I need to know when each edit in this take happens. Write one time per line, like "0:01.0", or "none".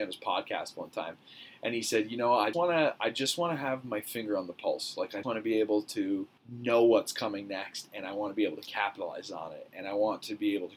0:02.5
0:05.2
0:06.4

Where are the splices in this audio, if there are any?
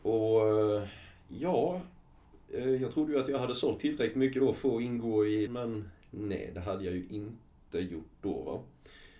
0:05.5

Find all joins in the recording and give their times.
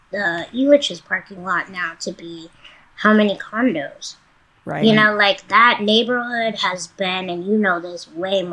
none

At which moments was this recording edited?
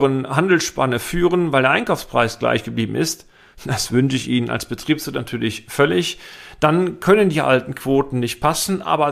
none

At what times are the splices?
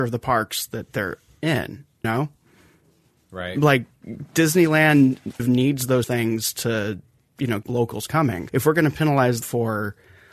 0:02.0
0:05.4
0:06.0
0:07.6
0:08.5
0:09.4

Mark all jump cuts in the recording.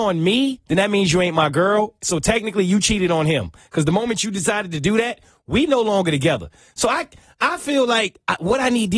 none

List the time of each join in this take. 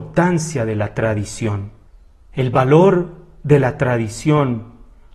0:01.9

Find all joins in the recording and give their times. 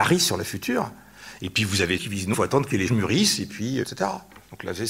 0:02.0
0:02.3
0:02.9
0:03.8

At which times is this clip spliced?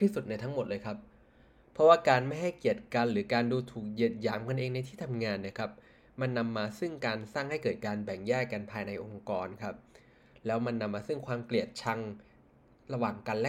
none

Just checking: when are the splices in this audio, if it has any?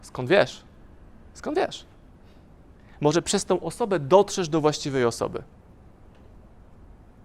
none

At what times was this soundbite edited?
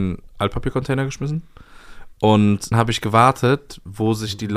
0:02.7

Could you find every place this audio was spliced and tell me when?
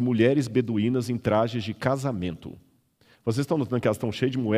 none

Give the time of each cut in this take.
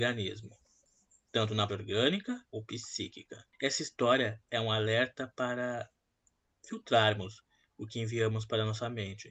0:01.7
0:02.4
0:03.5

